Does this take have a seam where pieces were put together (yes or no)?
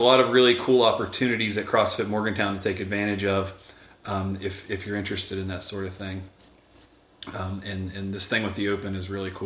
no